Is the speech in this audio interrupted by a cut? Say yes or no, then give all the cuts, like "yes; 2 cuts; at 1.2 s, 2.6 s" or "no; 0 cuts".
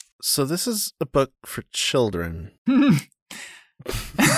no; 0 cuts